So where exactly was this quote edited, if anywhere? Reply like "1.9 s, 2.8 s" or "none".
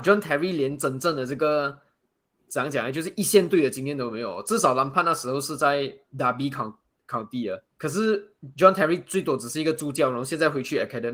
7.7 s